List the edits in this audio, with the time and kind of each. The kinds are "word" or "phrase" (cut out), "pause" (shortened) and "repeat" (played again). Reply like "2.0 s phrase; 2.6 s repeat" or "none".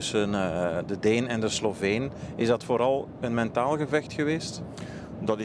none